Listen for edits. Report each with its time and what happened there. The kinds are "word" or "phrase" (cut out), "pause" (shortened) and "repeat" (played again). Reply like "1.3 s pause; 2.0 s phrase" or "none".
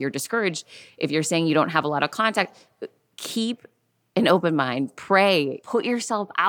none